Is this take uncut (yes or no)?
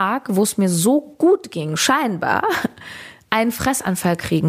yes